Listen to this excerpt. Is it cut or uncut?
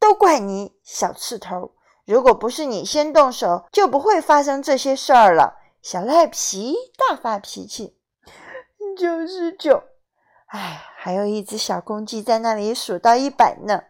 cut